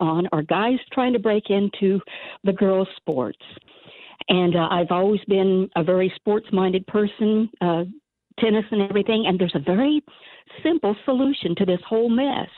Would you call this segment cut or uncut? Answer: uncut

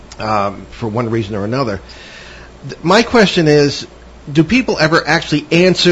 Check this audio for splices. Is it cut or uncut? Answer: uncut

